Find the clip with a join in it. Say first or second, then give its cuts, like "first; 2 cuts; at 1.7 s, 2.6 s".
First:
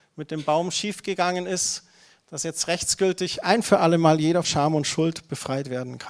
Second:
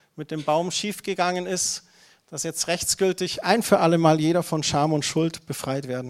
first; 1 cut; at 4.4 s